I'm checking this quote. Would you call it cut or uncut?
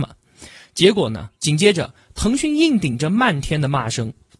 cut